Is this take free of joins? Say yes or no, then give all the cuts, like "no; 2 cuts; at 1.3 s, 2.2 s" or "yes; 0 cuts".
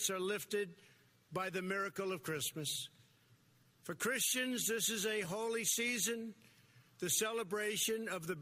yes; 0 cuts